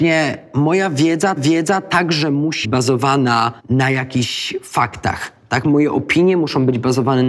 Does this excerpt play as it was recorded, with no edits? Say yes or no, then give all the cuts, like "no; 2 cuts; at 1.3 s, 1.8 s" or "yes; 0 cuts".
no; 3 cuts; at 1.4 s, 2.6 s, 3.6 s